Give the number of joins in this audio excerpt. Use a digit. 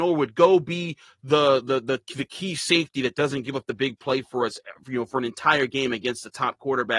0